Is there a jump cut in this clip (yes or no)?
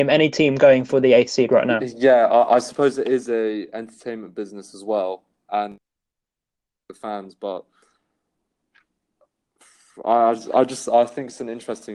no